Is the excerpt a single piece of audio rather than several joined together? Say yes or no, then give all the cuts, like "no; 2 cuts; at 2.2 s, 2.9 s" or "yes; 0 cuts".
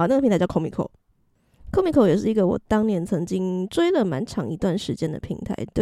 yes; 0 cuts